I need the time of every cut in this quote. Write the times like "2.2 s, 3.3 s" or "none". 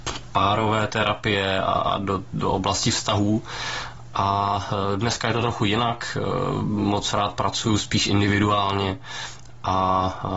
none